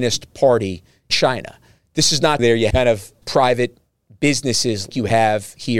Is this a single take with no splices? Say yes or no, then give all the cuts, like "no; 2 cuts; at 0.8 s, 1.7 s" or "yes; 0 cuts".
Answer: no; 5 cuts; at 1.1 s, 2.4 s, 2.7 s, 3.2 s, 4.9 s